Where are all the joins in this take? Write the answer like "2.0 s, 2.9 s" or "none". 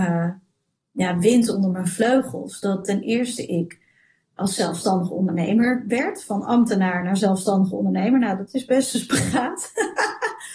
none